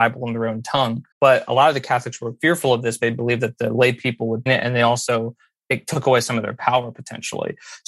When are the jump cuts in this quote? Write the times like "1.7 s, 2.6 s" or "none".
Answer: 1.1 s, 3.0 s, 4.5 s